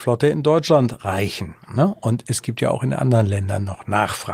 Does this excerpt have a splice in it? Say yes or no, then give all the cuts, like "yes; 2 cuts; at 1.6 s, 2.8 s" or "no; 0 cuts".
no; 0 cuts